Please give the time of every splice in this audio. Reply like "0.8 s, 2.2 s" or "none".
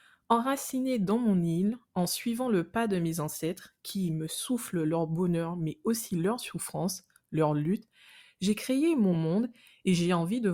none